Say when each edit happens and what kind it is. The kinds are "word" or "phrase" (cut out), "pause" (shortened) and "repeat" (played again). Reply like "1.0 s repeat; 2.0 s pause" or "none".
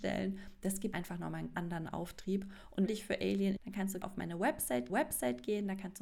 0.9 s word; 1.5 s word; 2.9 s phrase; 3.6 s word; 4.0 s word; 4.9 s repeat